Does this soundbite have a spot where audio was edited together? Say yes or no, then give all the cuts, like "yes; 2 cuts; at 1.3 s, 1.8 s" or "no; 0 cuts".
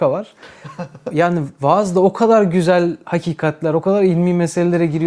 no; 0 cuts